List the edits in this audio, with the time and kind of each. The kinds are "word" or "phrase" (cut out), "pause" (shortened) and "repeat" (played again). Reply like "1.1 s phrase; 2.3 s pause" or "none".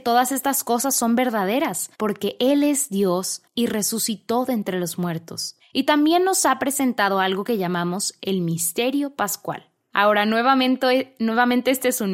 3.5 s pause